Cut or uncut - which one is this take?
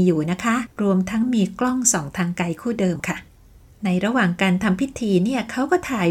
uncut